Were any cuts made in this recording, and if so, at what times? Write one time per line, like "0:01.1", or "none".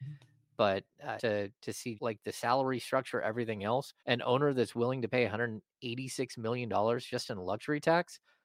0:01.2
0:02.0
0:04.0